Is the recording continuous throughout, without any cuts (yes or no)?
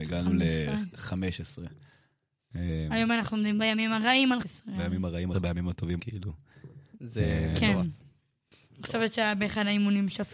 no